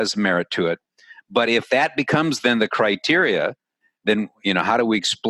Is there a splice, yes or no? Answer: no